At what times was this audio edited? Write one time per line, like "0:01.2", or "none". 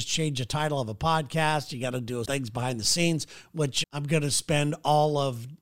0:02.3
0:03.8